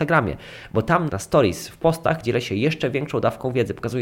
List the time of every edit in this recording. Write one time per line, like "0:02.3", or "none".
0:01.1